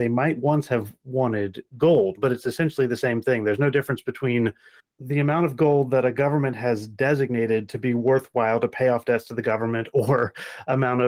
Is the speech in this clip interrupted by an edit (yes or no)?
no